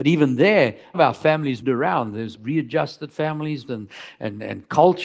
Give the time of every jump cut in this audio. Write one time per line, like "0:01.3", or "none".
0:00.9
0:01.6
0:02.3
0:03.7